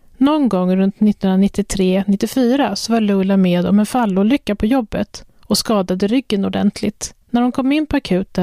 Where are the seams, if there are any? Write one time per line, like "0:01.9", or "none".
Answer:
0:07.2